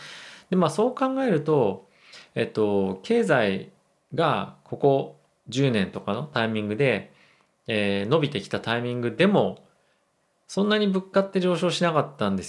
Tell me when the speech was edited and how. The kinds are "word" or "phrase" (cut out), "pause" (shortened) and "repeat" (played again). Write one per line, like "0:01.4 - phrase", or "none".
none